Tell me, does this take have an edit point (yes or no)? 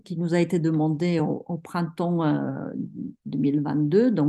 no